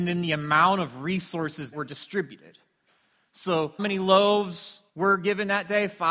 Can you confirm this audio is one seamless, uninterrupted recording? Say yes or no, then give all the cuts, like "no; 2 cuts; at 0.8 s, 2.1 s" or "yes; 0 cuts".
no; 3 cuts; at 1.7 s, 3.8 s, 4.9 s